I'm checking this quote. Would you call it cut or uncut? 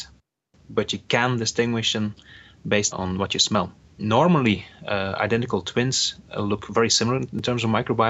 uncut